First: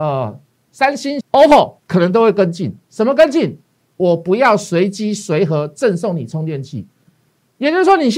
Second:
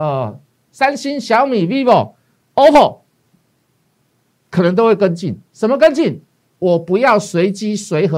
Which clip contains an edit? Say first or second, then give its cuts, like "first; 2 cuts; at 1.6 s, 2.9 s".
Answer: first; 2 cuts; at 1.2 s, 1.8 s